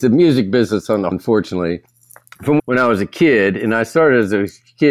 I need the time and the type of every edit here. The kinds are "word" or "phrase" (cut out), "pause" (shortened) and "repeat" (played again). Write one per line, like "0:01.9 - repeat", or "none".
0:01.1 - word
0:02.6 - phrase